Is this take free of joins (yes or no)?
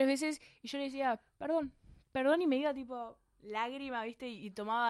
yes